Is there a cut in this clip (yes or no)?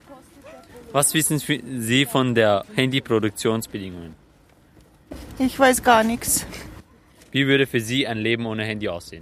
no